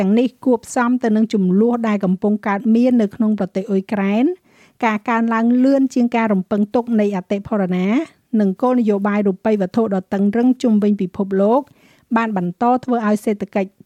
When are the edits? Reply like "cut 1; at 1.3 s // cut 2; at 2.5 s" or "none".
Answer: none

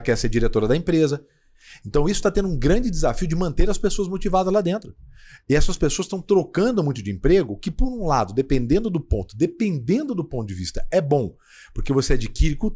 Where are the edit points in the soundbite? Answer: none

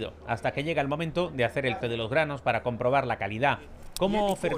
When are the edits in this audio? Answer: cut 1; at 1.8 s

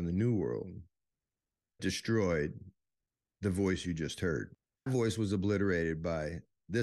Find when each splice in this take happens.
cut 1; at 1.8 s // cut 2; at 4.9 s

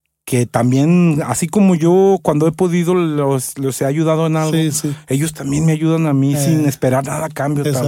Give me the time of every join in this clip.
none

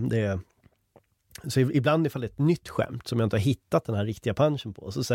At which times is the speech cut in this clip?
none

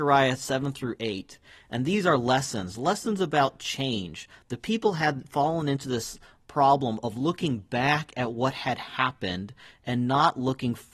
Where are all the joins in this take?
none

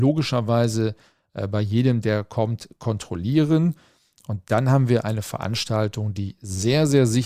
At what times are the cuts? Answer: none

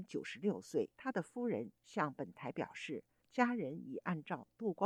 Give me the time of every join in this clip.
cut 1; at 0.9 s

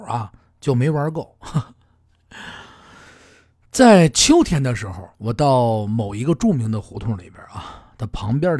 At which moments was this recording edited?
cut 1; at 5.1 s

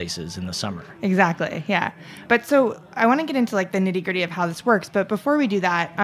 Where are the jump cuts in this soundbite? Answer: cut 1; at 2.2 s

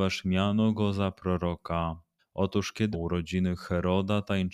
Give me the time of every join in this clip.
cut 1; at 2.2 s // cut 2; at 2.9 s

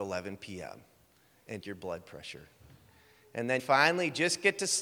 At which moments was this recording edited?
cut 1; at 1.6 s // cut 2; at 3.6 s

